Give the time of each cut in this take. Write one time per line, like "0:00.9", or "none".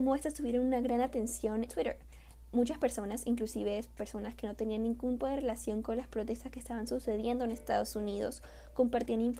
0:01.7
0:05.2